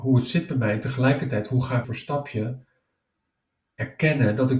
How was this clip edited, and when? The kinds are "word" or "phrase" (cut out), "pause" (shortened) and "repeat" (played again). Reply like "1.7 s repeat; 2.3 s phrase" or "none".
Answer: 1.8 s word